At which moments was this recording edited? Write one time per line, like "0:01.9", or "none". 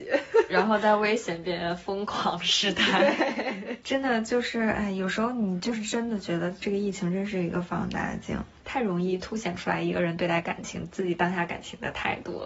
none